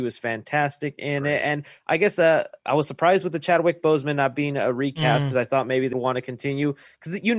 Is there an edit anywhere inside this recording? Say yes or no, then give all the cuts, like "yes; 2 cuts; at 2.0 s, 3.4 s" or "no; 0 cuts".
yes; 1 cut; at 5.9 s